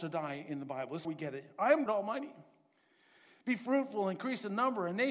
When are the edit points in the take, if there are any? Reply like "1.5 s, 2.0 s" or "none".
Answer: 1.0 s, 1.9 s